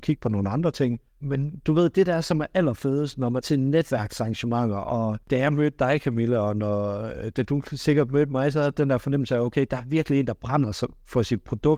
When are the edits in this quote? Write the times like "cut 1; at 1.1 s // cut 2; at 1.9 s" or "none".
cut 1; at 1.1 s // cut 2; at 3.4 s // cut 3; at 5.2 s